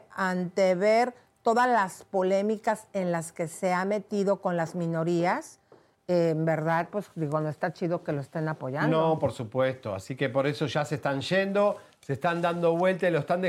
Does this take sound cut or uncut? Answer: uncut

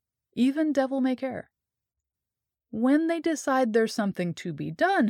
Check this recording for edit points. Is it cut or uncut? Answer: uncut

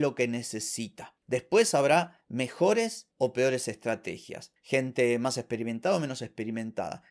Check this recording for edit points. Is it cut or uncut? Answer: uncut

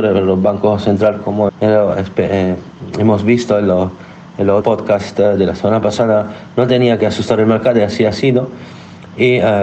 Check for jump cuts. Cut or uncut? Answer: cut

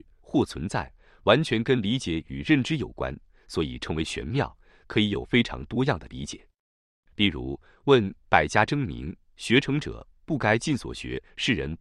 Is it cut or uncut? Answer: uncut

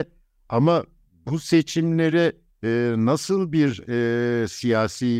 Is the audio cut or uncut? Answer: uncut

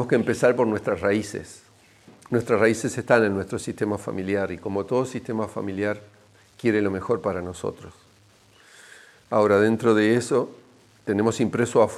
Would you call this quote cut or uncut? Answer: uncut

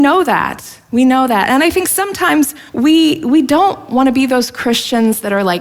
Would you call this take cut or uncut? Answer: cut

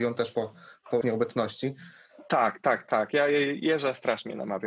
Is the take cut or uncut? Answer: cut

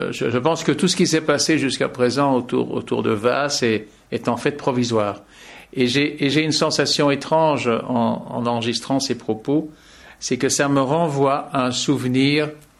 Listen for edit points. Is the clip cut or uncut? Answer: uncut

